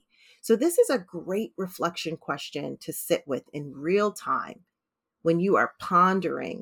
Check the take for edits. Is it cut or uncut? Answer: uncut